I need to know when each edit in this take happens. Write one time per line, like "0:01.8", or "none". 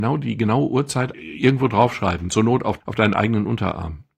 none

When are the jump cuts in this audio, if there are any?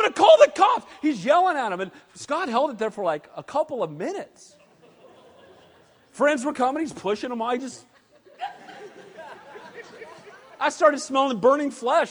none

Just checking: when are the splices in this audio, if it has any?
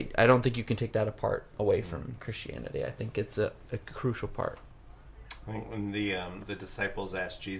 0:01.5

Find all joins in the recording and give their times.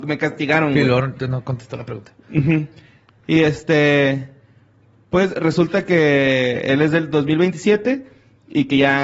none

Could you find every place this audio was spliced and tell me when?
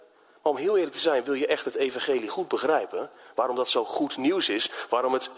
none

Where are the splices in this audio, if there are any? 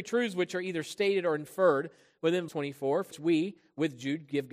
0:02.5
0:03.1

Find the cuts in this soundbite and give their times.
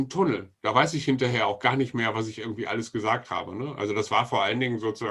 none

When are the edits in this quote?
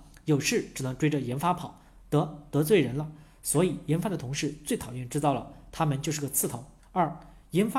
0:06.8

